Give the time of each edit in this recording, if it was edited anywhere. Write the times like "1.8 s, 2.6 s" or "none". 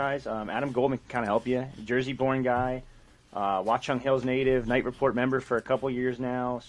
none